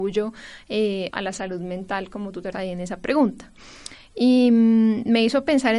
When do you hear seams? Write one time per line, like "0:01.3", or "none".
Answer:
0:01.1
0:02.5

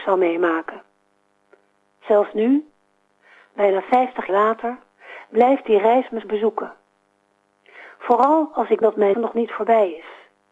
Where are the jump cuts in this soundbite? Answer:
0:04.3
0:06.2
0:08.8
0:09.1

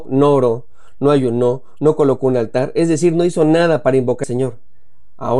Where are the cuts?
0:04.2

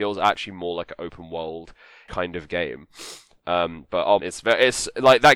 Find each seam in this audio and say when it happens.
0:02.1
0:04.2

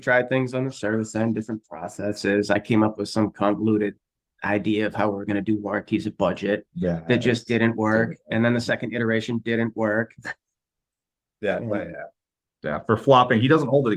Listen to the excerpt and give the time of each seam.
none

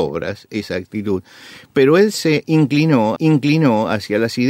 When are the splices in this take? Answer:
0:03.2

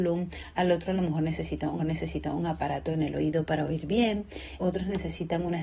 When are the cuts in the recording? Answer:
0:01.8
0:04.6

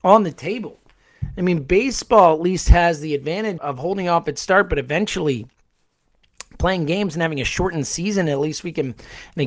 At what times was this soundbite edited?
0:03.6

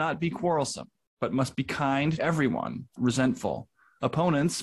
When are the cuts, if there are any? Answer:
0:02.2
0:03.0

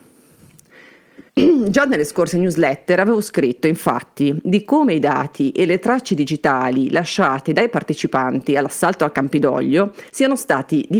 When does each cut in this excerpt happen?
0:01.3
0:10.1

